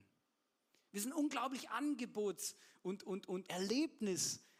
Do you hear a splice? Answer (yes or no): yes